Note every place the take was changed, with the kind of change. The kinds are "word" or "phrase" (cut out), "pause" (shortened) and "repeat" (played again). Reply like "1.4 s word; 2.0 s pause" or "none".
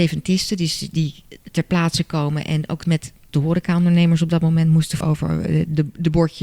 2.8 s word; 5.0 s word